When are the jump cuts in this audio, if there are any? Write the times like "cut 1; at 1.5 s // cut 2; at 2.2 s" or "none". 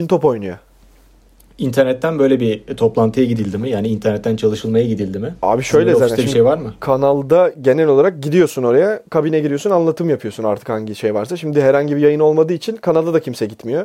cut 1; at 5.4 s

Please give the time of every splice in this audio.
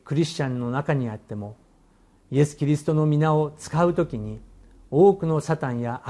none

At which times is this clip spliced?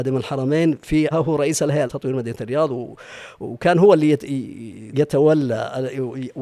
cut 1; at 1.1 s // cut 2; at 1.9 s // cut 3; at 4.9 s

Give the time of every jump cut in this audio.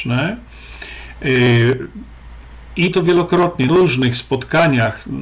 cut 1; at 2.9 s // cut 2; at 3.7 s

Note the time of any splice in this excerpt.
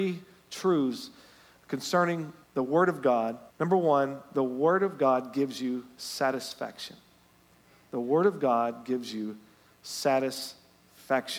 cut 1; at 2.4 s // cut 2; at 3.5 s

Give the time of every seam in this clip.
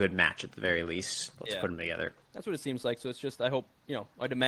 cut 1; at 2.2 s

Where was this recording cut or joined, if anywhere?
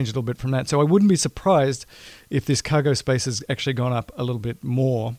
none

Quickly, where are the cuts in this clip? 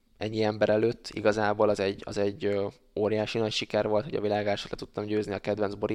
none

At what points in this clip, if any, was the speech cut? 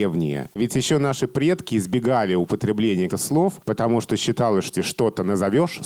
cut 1; at 3.1 s // cut 2; at 4.7 s

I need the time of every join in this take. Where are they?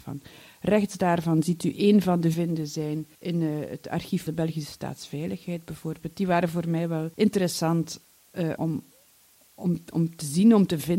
cut 1; at 2.3 s // cut 2; at 3.1 s // cut 3; at 4.3 s // cut 4; at 7.1 s // cut 5; at 8.6 s

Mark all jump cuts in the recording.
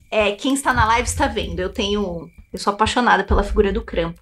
none

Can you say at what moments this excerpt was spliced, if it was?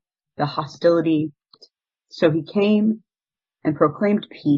cut 1; at 1.5 s

